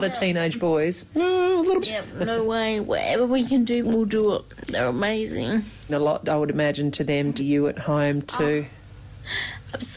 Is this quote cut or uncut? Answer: cut